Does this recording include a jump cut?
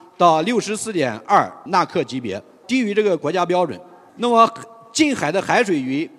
no; 0 cuts

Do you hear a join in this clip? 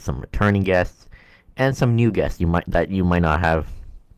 no; 0 cuts

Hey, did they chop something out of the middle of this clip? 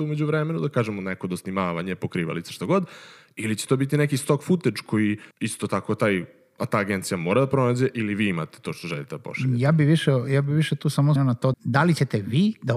yes; 3 cuts; at 5.3 s, 11.2 s, 11.5 s

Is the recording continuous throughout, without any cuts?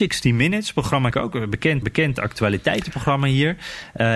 no; 2 cuts; at 1.1 s, 1.8 s

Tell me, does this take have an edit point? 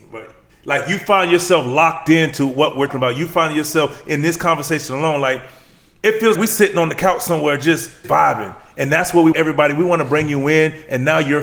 yes; 4 cuts; at 2.9 s, 6.3 s, 8.0 s, 9.3 s

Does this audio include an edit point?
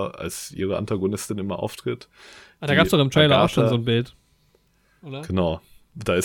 no; 0 cuts

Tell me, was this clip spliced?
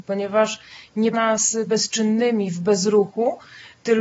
yes; 2 cuts; at 1.1 s, 1.7 s

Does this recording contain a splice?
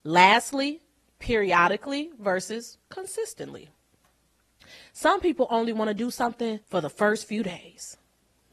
yes; 2 cuts; at 2.8 s, 6.6 s

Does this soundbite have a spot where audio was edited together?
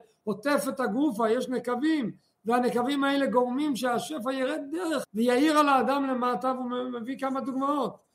yes; 1 cut; at 5.0 s

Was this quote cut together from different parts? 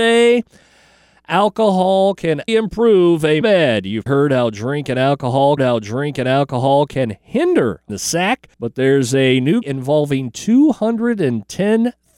yes; 7 cuts; at 2.5 s, 3.4 s, 4.1 s, 5.6 s, 7.9 s, 8.5 s, 9.6 s

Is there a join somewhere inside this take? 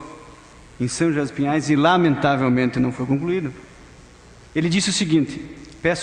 no; 0 cuts

